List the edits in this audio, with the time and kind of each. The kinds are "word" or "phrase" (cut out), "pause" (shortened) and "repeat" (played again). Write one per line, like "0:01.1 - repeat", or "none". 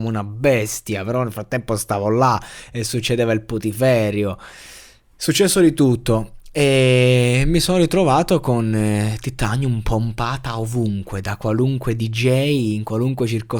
none